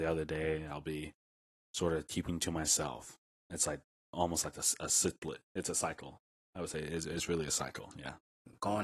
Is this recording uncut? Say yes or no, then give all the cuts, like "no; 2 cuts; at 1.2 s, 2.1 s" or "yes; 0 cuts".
yes; 0 cuts